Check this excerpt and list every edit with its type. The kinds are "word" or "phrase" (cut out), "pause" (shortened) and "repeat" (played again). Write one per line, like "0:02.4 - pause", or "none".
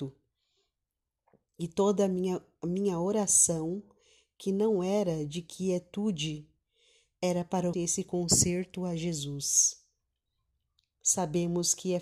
0:07.7 - word